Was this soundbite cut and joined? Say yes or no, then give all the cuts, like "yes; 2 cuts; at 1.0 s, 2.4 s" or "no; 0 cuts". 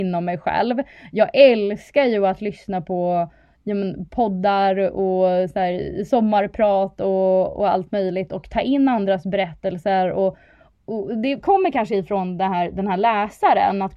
no; 0 cuts